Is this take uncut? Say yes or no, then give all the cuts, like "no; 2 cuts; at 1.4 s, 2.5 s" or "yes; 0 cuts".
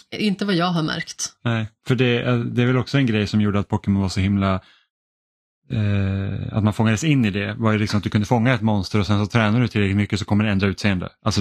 yes; 0 cuts